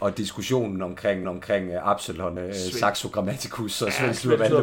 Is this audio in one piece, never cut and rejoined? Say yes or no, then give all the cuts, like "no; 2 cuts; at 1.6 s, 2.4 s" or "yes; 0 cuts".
no; 2 cuts; at 1.2 s, 2.4 s